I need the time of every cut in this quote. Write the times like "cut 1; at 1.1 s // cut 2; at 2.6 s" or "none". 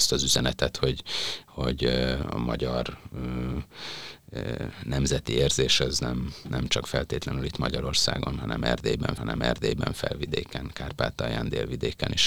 cut 1; at 9.2 s